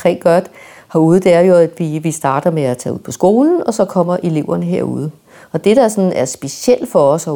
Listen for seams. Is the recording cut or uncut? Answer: uncut